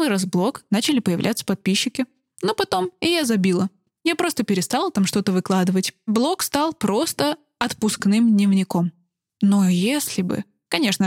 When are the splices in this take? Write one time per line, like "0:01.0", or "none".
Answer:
none

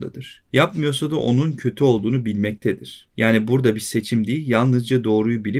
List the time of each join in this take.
none

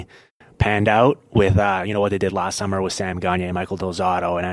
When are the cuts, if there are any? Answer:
none

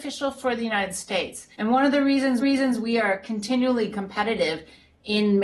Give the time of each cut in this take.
0:01.5
0:02.4
0:03.9

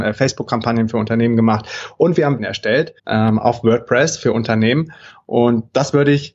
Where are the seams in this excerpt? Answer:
0:02.4
0:03.0

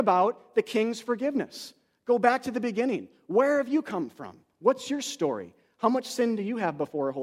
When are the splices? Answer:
none

